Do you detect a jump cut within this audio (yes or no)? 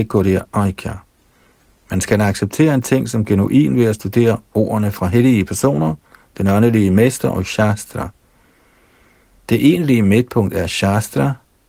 no